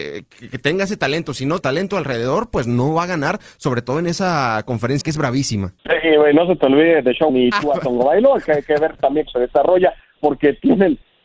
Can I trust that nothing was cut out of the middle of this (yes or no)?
no